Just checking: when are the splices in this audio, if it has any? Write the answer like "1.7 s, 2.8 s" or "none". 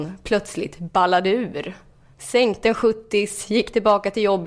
none